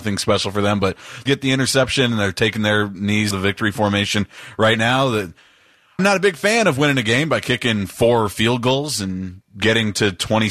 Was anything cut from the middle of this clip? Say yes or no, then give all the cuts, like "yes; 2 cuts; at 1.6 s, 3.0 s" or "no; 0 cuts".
yes; 3 cuts; at 1.3 s, 3.3 s, 6.0 s